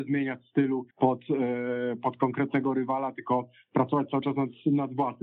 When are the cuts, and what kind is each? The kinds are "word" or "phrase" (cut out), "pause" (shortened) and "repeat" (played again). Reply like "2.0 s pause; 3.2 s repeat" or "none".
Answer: 0.9 s pause

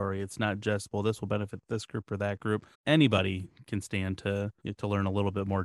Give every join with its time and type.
2.7 s pause; 4.6 s pause

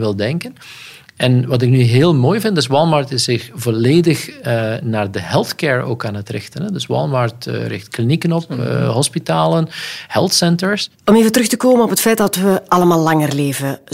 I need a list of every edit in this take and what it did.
none

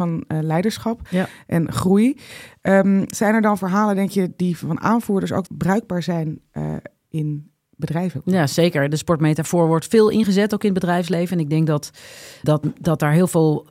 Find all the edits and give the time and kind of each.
5.5 s word; 12.4 s word

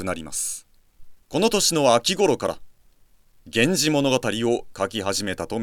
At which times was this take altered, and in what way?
1.2 s pause

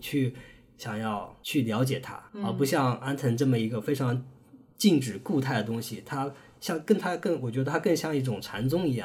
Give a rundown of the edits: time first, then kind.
2.3 s pause

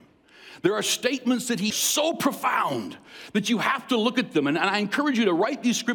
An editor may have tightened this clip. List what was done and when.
1.7 s phrase

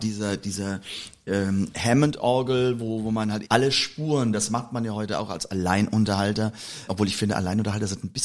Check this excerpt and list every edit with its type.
3.4 s word; 6.9 s word

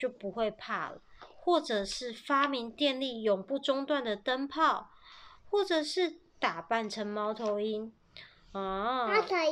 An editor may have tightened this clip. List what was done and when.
none

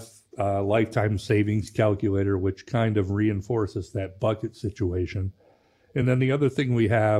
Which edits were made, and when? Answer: none

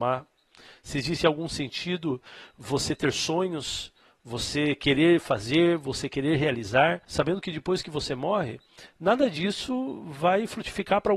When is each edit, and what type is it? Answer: none

